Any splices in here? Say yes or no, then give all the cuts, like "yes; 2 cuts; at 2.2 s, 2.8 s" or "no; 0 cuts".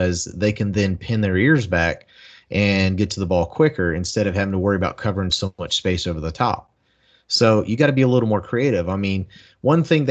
no; 0 cuts